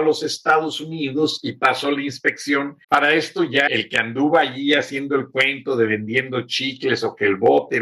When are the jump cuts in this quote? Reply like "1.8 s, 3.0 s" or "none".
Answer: 2.8 s, 3.7 s

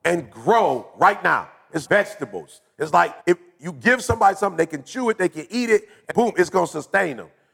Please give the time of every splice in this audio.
1.9 s, 3.2 s, 6.1 s

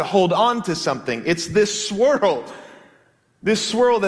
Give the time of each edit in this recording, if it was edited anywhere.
none

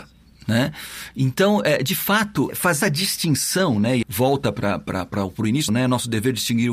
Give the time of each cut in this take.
2.5 s, 2.8 s, 4.0 s, 5.7 s

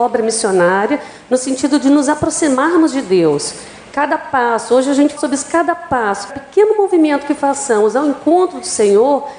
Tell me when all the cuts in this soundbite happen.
5.2 s, 6.3 s

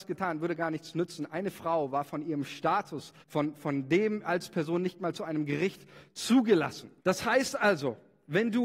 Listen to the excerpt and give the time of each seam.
3.2 s, 7.0 s

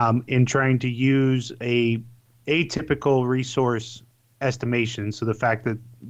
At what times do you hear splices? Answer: none

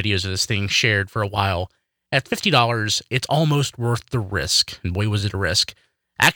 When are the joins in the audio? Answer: none

